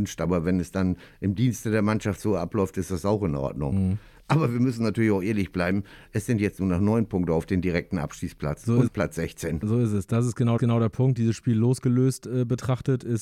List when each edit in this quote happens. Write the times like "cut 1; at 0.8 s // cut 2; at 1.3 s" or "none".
cut 1; at 8.9 s // cut 2; at 10.6 s